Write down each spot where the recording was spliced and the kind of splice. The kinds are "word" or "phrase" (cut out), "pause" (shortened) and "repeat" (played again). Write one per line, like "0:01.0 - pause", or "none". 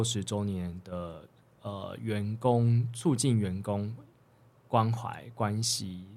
none